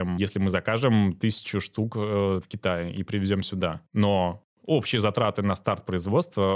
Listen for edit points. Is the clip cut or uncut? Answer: uncut